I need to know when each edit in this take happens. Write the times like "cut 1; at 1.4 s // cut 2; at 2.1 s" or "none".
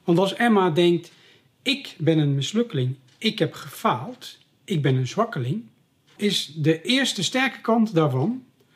cut 1; at 6.2 s